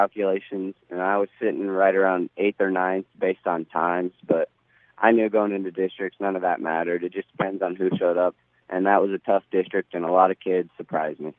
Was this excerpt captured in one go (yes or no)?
yes